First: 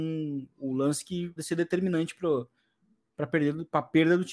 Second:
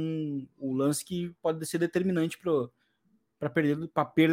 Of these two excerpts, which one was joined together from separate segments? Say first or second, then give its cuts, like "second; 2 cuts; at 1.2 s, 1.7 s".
first; 1 cut; at 1.4 s